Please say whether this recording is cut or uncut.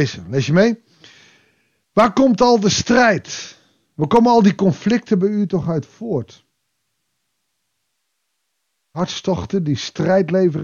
uncut